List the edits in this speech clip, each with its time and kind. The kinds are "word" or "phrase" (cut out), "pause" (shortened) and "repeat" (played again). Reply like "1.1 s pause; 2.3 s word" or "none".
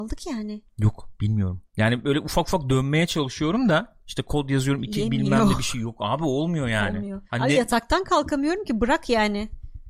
1.7 s pause; 7.2 s pause